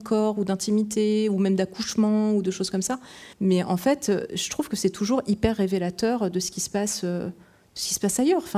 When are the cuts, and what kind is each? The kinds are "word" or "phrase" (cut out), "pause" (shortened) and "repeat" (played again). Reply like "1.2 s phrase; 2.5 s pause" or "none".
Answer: 3.3 s pause